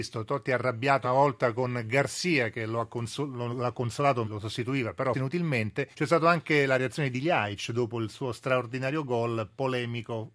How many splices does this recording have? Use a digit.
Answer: 4